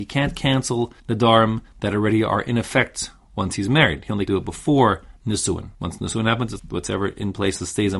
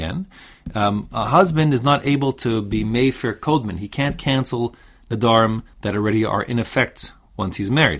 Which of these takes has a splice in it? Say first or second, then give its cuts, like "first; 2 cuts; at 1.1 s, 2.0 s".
first; 4 cuts; at 1.0 s, 4.3 s, 5.7 s, 6.6 s